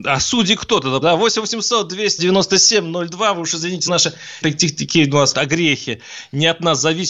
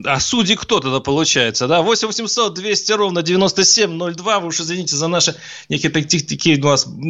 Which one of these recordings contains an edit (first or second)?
first